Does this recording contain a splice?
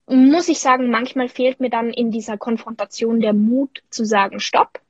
no; 0 cuts

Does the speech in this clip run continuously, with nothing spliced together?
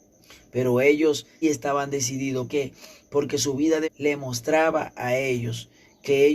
no; 3 cuts; at 1.4 s, 2.5 s, 3.8 s

